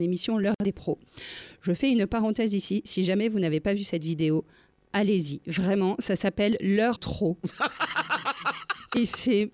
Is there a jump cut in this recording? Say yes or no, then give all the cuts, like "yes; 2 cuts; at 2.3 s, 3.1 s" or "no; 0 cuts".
yes; 1 cut; at 7.0 s